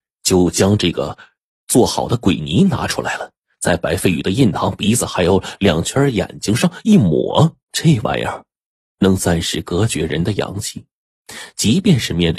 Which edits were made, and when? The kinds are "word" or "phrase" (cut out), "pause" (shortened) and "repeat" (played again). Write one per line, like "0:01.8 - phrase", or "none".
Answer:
0:07.6 - pause